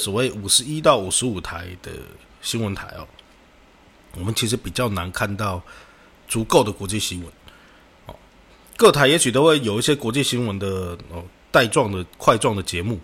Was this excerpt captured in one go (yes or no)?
yes